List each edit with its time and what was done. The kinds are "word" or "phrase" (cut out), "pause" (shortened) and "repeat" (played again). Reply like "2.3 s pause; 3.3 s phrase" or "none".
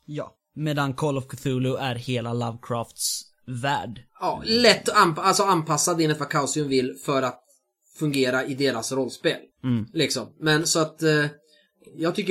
4.1 s pause; 9.5 s pause